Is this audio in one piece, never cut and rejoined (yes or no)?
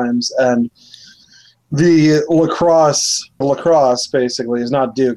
no